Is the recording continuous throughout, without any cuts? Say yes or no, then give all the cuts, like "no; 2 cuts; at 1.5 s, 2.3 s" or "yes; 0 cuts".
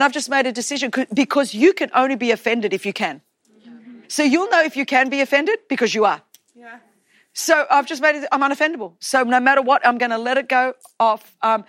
no; 1 cut; at 4.0 s